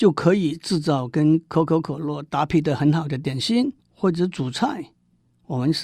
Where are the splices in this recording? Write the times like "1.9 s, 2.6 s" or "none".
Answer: 3.8 s